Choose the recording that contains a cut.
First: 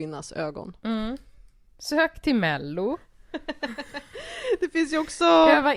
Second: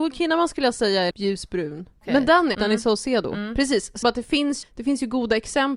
second; 4 cuts; at 1.1 s, 2.5 s, 4.0 s, 4.6 s

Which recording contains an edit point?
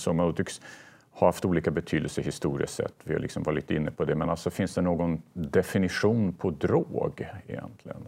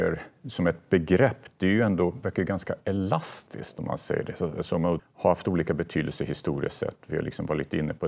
second; 1 cut; at 5.0 s

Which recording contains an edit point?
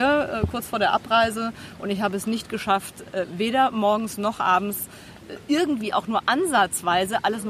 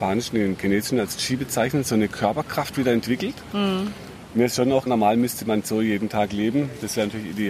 second; 1 cut; at 4.9 s

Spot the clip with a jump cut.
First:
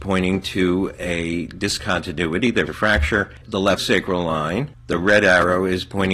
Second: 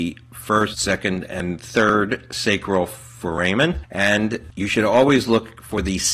first; 3 cuts; at 2.7 s, 3.4 s, 3.8 s

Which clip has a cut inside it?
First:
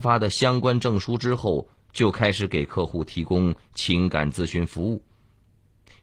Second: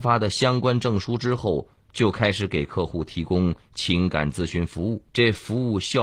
second; 1 cut; at 5.1 s

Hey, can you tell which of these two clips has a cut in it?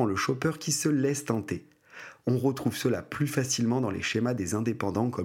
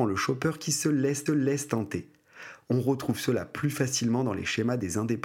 second; 1 cut; at 1.3 s

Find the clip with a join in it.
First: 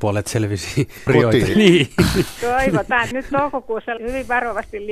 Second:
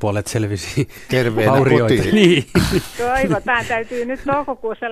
first; 3 cuts; at 1.1 s, 3.1 s, 4.0 s

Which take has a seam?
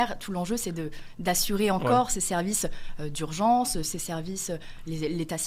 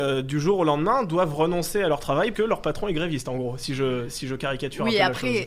second; 1 cut; at 2.3 s

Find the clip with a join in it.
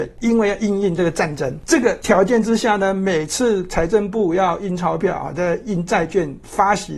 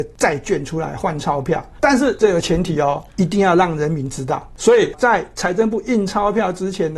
second; 1 cut; at 4.9 s

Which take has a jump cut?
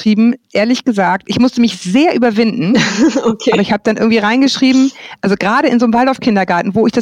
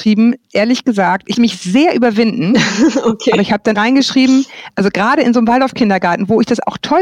second; 2 cuts; at 1.3 s, 3.7 s

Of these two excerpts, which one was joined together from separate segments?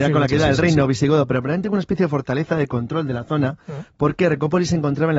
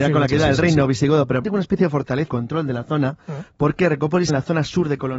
second; 3 cuts; at 1.4 s, 2.3 s, 4.3 s

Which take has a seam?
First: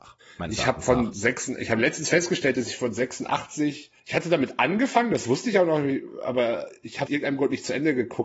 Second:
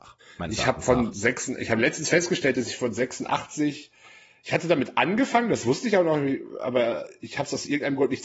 first; 2 cuts; at 4.0 s, 7.1 s

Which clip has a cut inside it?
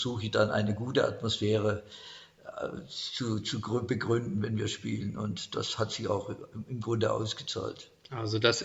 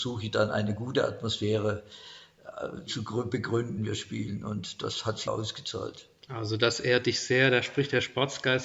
second; 3 cuts; at 2.9 s, 3.8 s, 5.3 s

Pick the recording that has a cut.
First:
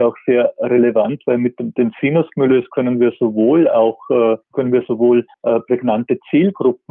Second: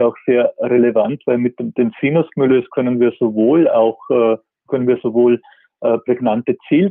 first; 2 cuts; at 4.4 s, 5.3 s

